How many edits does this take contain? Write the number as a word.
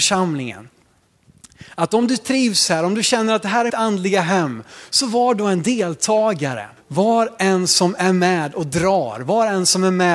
two